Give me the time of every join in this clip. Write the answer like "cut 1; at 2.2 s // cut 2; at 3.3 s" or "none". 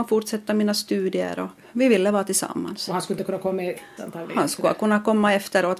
cut 1; at 4.0 s